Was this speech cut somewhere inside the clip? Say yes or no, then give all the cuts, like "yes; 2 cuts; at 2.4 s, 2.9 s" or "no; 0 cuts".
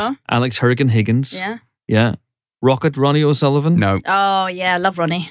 no; 0 cuts